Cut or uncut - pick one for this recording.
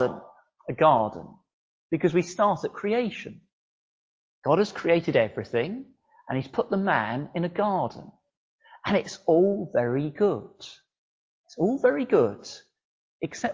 uncut